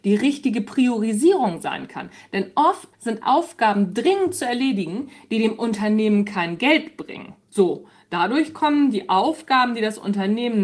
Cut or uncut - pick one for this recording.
cut